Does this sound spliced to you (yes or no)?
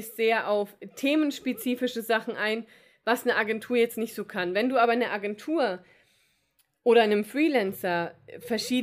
no